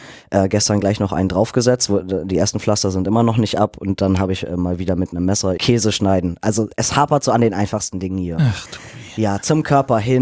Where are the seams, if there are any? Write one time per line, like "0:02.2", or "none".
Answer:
0:05.6
0:06.7